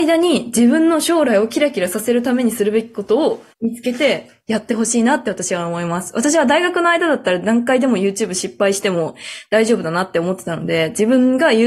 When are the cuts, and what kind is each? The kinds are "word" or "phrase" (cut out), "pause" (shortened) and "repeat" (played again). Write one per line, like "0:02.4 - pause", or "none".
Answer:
0:03.5 - pause